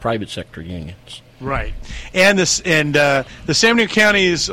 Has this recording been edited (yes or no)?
no